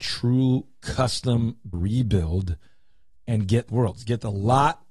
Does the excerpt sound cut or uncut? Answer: cut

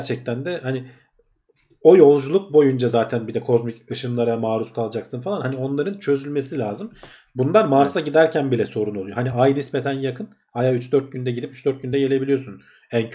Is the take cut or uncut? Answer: uncut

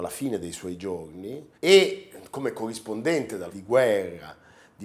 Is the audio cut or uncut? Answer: cut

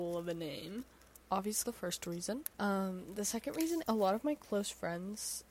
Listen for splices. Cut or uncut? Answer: cut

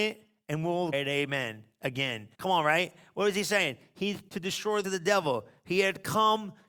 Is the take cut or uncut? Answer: cut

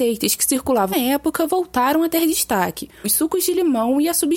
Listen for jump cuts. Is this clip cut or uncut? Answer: cut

